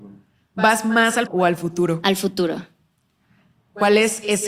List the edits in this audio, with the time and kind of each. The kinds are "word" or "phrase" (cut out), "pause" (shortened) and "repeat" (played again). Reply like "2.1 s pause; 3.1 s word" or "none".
1.3 s word